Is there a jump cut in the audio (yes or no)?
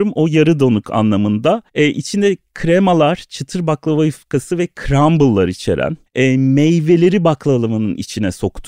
yes